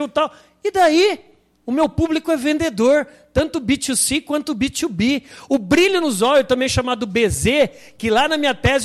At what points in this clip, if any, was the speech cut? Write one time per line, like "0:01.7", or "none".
none

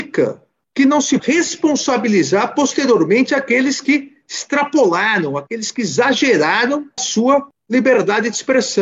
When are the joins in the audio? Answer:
0:01.2
0:07.0

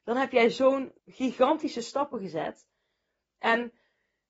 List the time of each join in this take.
0:01.0

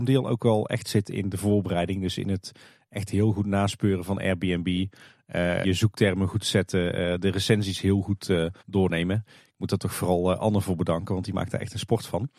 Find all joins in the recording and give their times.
0:05.6
0:08.6

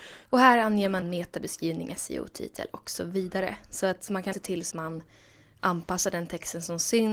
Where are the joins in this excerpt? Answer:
0:01.0
0:04.3
0:04.7

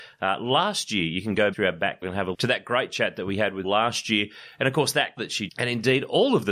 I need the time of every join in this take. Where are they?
0:01.5
0:02.0
0:02.3
0:03.6
0:05.2
0:05.5

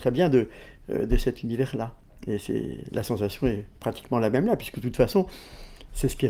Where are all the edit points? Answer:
none

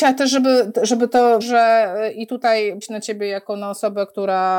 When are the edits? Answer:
0:01.4
0:02.8

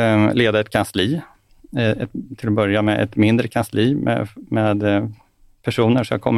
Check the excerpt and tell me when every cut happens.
none

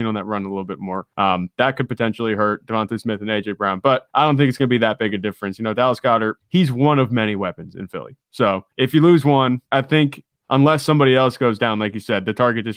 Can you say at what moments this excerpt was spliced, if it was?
0:01.1
0:04.1
0:06.4
0:08.7
0:09.7

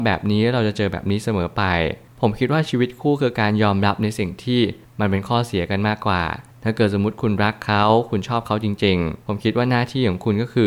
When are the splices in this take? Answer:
0:09.2

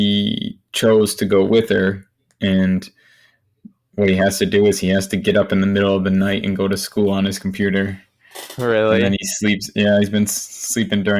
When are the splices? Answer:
none

